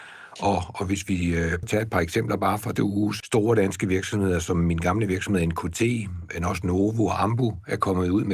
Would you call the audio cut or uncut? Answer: cut